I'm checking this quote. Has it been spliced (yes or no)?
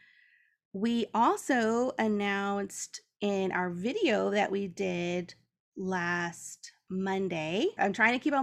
no